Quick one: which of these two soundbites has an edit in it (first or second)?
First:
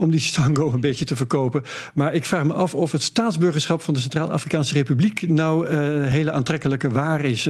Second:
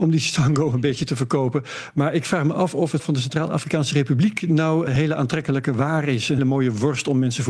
second